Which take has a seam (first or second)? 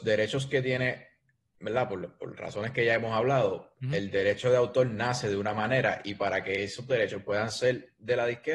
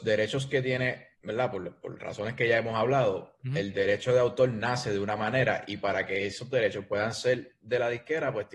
second